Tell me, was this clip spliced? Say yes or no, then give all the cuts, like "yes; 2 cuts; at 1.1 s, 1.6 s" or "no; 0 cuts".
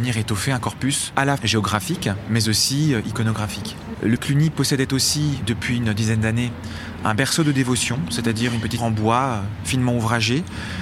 yes; 3 cuts; at 1.4 s, 4.2 s, 8.8 s